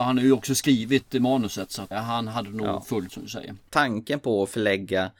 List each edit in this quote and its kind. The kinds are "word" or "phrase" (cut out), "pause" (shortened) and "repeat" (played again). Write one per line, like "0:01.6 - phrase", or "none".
0:01.9 - word
0:03.1 - word